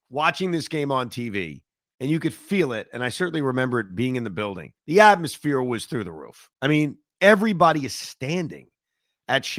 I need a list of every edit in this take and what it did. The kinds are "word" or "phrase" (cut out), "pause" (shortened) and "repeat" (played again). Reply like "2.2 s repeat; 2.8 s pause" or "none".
4.8 s pause

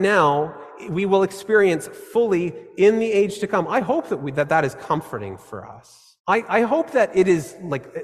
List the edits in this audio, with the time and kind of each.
6.2 s pause

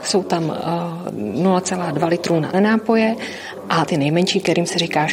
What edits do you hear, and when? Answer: 2.5 s word; 3.9 s word

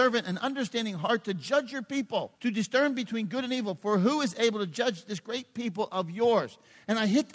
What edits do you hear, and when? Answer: 2.4 s pause

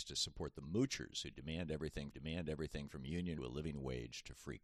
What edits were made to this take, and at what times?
2.1 s repeat; 3.4 s phrase

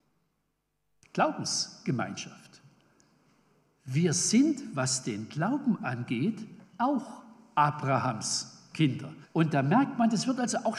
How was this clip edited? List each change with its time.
6.6 s pause; 9.2 s pause

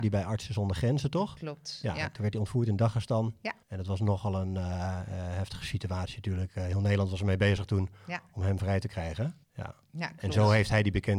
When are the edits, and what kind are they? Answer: 3.6 s pause; 9.4 s pause

